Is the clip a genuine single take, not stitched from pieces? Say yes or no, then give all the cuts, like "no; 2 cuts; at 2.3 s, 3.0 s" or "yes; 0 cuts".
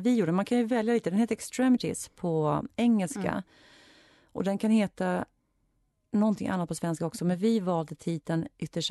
yes; 0 cuts